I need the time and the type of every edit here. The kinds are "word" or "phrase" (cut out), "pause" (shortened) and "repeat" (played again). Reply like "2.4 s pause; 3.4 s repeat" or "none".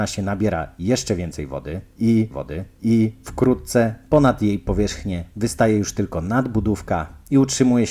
2.3 s repeat